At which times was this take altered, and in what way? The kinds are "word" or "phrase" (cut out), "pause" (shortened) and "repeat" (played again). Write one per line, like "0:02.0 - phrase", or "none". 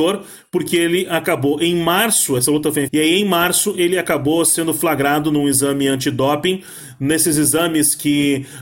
0:02.9 - word